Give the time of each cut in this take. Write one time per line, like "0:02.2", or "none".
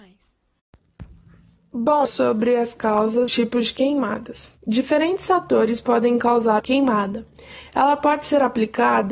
0:02.0
0:03.3
0:04.6
0:06.6